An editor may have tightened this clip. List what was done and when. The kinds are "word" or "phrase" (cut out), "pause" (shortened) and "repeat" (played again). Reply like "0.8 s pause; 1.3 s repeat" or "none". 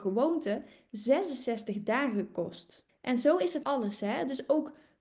2.9 s pause; 3.6 s word